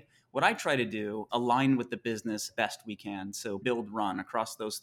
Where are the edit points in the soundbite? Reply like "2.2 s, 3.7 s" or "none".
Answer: 1.3 s, 2.5 s, 3.6 s